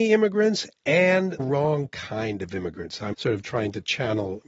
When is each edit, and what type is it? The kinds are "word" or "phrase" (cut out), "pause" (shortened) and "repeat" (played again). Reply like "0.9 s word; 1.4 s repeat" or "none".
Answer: 1.4 s word; 3.1 s word